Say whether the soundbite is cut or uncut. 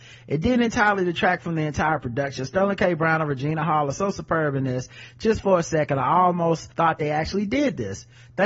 cut